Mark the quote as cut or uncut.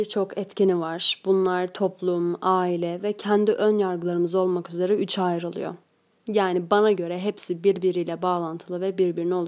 uncut